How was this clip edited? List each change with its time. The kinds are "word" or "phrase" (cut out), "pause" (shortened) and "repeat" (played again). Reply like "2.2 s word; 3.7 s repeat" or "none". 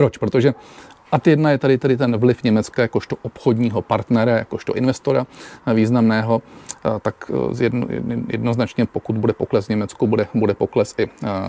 none